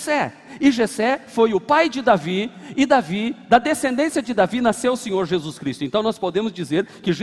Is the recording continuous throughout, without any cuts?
yes; 0 cuts

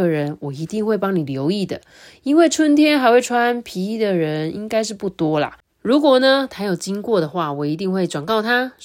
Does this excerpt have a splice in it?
no; 0 cuts

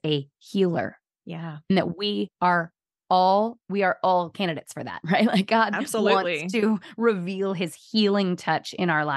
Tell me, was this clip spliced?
yes; 1 cut; at 3.6 s

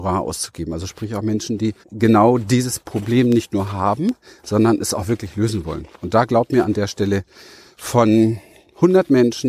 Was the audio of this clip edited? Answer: yes; 1 cut; at 1.8 s

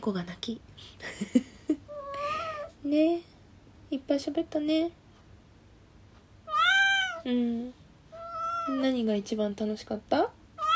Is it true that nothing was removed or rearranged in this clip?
yes; 0 cuts

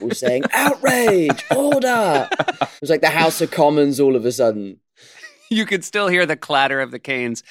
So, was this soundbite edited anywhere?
yes; 1 cut; at 2.8 s

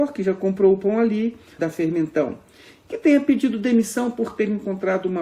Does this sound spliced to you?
yes; 1 cut; at 1.6 s

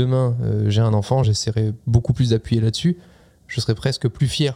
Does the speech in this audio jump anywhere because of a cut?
no; 0 cuts

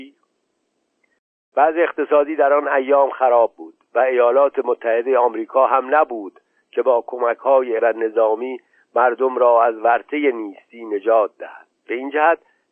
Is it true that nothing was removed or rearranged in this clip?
no; 1 cut; at 7.8 s

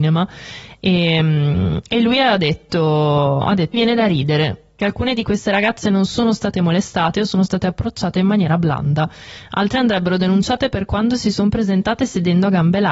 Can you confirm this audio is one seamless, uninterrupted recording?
no; 2 cuts; at 3.7 s, 4.8 s

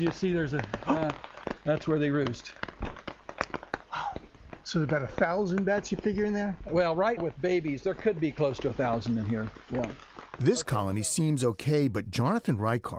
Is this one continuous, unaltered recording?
no; 1 cut; at 7.2 s

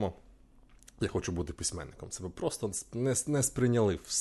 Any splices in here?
no; 0 cuts

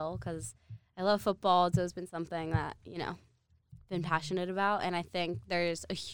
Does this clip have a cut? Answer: no; 0 cuts

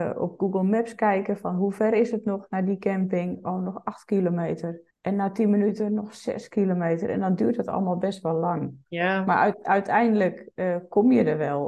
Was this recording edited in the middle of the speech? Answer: yes; 1 cut; at 4.9 s

